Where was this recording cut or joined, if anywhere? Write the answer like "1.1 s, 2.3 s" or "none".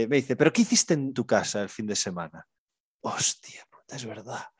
1.1 s, 3.0 s